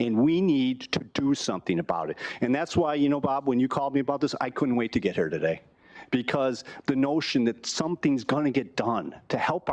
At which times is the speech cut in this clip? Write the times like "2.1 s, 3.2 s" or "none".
none